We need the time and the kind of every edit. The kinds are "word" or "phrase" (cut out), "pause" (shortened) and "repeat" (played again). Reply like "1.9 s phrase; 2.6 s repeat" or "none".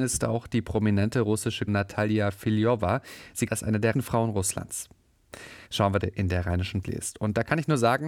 1.7 s word; 3.5 s word; 3.9 s word; 5.7 s pause; 6.0 s phrase; 6.8 s word